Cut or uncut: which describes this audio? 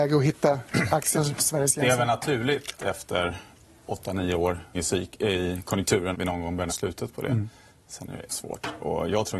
cut